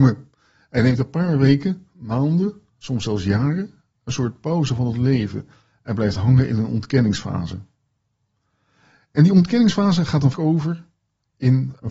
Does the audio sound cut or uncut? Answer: cut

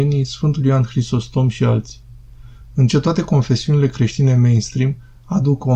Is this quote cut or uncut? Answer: cut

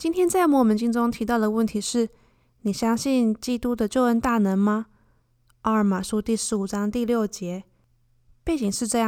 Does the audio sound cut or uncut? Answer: uncut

